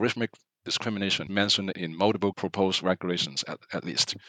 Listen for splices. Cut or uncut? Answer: cut